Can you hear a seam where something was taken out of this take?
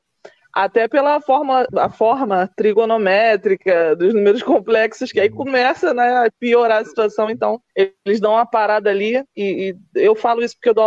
yes; 2 cuts; at 7.7 s, 9.3 s

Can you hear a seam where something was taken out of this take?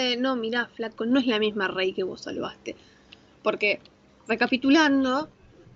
no; 0 cuts

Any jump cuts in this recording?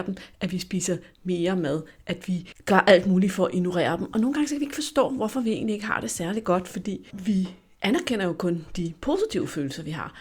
no; 0 cuts

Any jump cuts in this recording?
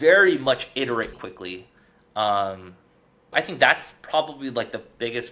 yes; 2 cuts; at 1.1 s, 3.3 s

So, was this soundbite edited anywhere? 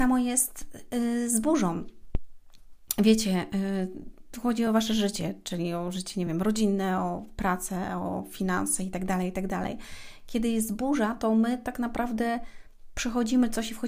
no; 0 cuts

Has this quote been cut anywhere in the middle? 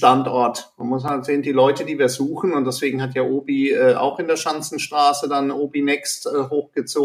no; 0 cuts

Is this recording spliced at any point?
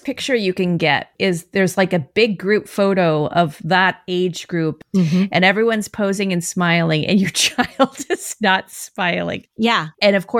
yes; 1 cut; at 9.5 s

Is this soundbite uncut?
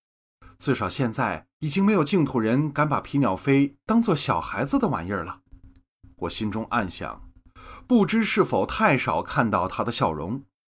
no; 2 cuts; at 1.5 s, 5.5 s

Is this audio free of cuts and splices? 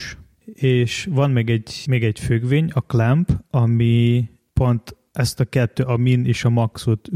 yes; 0 cuts

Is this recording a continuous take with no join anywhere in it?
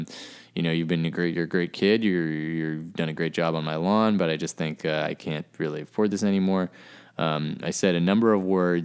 yes; 0 cuts

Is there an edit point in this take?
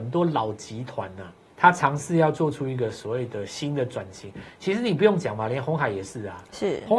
yes; 1 cut; at 1.5 s

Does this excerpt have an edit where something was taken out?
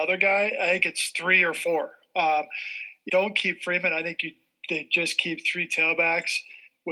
yes; 1 cut; at 3.1 s

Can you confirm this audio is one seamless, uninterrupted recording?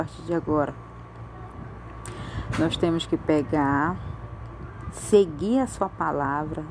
yes; 0 cuts

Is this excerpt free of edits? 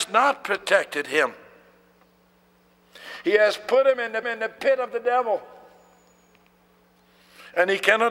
no; 1 cut; at 4.2 s

